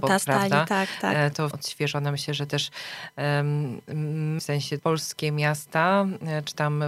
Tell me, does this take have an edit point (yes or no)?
yes